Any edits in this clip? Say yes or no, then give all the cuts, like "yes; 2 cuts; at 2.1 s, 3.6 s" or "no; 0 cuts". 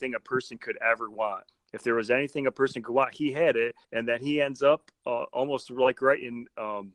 yes; 2 cuts; at 1.5 s, 3.8 s